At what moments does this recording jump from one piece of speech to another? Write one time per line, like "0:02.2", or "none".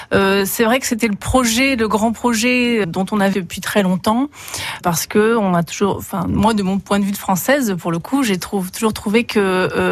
0:02.8
0:03.3
0:04.8